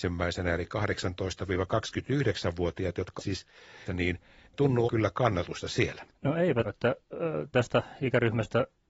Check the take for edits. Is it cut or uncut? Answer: cut